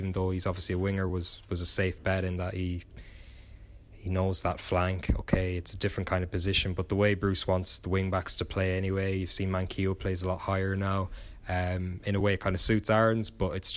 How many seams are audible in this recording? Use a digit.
0